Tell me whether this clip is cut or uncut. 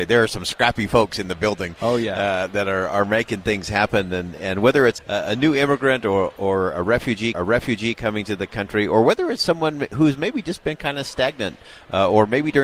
cut